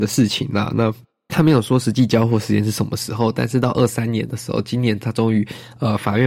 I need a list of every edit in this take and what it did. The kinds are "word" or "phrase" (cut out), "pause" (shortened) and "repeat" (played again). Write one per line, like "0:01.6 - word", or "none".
0:01.1 - pause